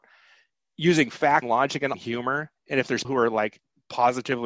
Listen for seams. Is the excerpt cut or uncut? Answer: cut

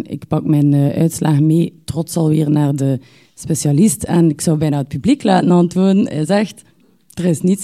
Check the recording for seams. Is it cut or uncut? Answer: uncut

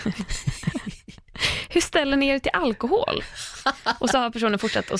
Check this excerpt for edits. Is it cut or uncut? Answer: uncut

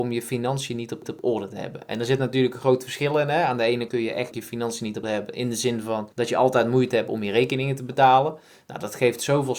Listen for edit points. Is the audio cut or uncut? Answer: cut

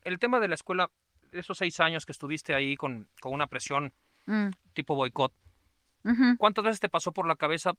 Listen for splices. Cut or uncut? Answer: uncut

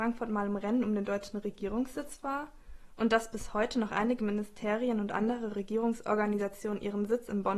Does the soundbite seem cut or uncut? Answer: uncut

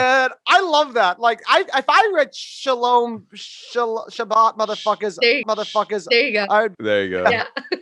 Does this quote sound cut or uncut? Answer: cut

